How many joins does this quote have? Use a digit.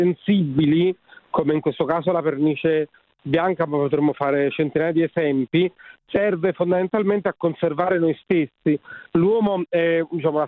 0